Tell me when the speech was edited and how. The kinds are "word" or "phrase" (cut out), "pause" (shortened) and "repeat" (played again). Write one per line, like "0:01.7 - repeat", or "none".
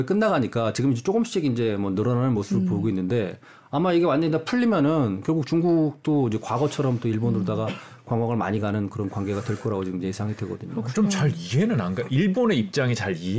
none